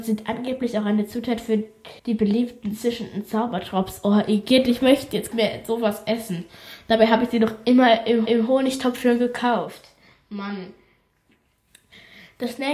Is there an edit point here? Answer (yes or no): yes